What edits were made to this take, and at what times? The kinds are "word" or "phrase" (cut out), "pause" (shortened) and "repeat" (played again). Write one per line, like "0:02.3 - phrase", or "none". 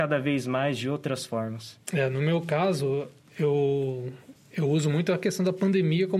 0:01.8 - pause
0:04.4 - pause